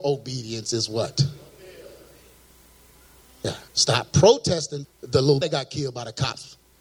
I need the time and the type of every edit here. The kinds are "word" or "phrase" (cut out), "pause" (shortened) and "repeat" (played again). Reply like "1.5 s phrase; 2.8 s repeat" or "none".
3.7 s pause; 4.8 s word; 5.4 s word